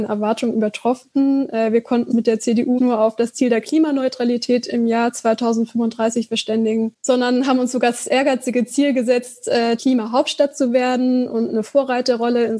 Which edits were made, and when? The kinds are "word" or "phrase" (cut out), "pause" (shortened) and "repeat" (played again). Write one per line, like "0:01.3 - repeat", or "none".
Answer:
0:02.1 - word
0:02.8 - word
0:09.8 - word